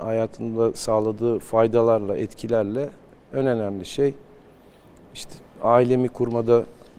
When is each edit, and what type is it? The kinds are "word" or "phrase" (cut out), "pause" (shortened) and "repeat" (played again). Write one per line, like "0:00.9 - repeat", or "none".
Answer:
none